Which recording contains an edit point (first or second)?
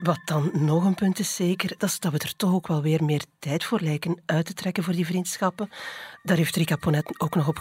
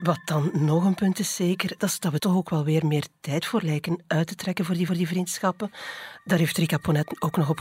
second